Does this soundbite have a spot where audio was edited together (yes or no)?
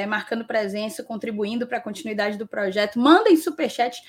no